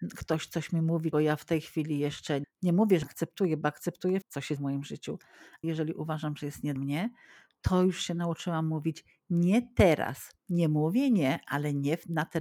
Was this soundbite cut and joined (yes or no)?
yes